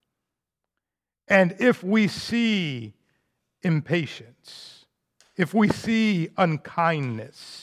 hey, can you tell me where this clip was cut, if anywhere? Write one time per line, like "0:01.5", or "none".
none